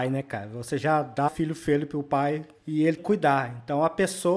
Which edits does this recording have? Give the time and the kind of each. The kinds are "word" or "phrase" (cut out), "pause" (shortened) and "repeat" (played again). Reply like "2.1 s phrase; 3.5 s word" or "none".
1.3 s word; 2.6 s word; 3.0 s word